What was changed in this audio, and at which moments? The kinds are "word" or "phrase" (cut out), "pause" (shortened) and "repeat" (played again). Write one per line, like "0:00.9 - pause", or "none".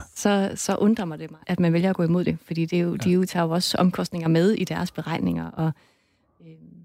0:01.4 - word

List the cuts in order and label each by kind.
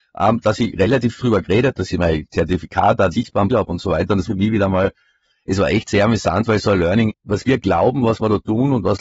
0:01.2 - word
0:01.7 - word
0:03.1 - word
0:03.5 - word
0:04.2 - word
0:07.1 - word

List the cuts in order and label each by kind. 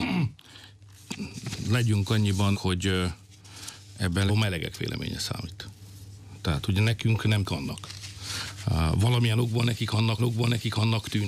0:02.5 - word
0:04.3 - word
0:07.4 - word
0:10.2 - repeat

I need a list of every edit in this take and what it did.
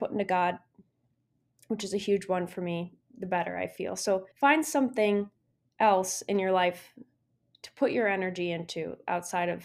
0:04.3 - pause

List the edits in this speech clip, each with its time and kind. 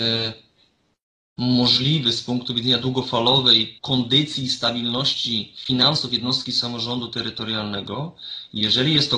0:03.8 - pause

